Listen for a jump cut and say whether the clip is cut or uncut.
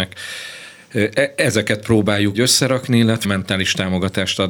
cut